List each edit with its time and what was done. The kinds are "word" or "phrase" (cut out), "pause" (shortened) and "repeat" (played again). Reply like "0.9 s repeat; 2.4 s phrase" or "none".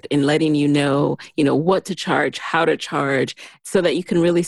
none